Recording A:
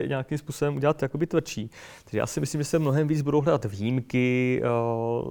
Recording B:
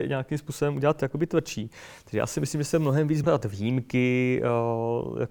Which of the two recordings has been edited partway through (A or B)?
B